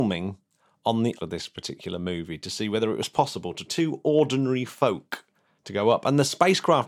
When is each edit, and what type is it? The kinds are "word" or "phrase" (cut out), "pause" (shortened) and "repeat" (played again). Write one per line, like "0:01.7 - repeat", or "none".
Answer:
0:01.2 - word
0:03.7 - word
0:05.3 - pause